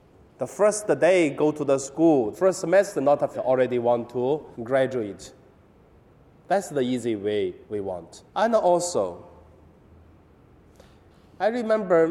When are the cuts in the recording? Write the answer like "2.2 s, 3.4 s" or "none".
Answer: 2.3 s, 3.3 s, 4.5 s, 7.6 s, 8.3 s